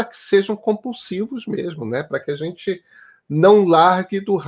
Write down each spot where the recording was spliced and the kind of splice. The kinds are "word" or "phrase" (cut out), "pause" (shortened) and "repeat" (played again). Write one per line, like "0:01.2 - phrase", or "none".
none